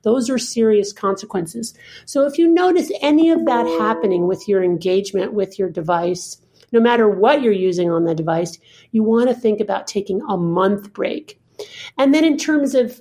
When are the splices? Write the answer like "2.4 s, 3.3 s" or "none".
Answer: none